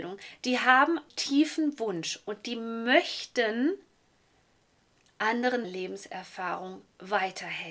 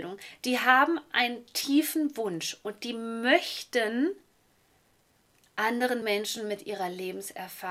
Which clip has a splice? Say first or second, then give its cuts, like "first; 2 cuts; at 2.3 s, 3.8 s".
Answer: first; 2 cuts; at 1.1 s, 5.6 s